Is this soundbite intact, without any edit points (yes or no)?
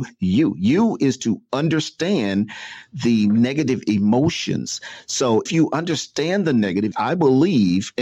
no